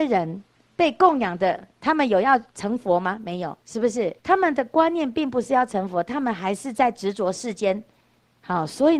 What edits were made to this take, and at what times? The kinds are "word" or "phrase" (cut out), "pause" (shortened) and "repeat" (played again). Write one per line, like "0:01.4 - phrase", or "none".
0:02.5 - pause
0:03.6 - pause
0:04.2 - pause